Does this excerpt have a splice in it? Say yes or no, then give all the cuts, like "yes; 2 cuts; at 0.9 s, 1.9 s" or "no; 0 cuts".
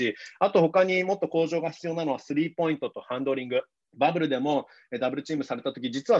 yes; 1 cut; at 3.8 s